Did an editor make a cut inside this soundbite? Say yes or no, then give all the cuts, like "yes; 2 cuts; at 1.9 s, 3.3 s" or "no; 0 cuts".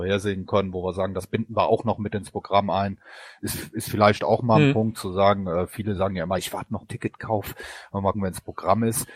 yes; 3 cuts; at 6.4 s, 6.8 s, 8.1 s